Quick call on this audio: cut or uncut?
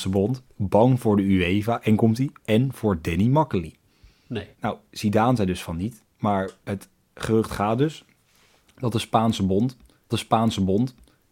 cut